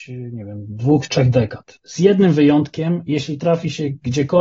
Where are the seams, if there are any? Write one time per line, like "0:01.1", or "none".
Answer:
none